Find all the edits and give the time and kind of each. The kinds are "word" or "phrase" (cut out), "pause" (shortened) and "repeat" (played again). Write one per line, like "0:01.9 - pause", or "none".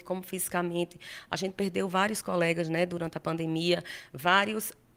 none